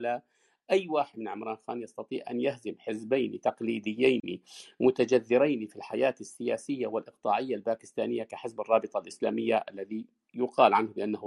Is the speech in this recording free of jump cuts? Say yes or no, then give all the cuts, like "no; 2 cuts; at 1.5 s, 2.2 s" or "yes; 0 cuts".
yes; 0 cuts